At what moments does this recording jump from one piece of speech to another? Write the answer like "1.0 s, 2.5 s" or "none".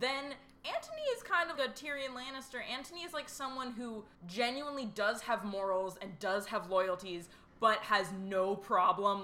1.6 s, 4.1 s